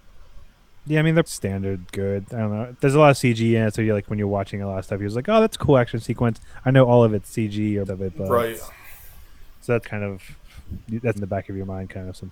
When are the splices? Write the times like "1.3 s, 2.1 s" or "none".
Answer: 1.3 s, 2.7 s, 7.9 s, 9.8 s, 11.1 s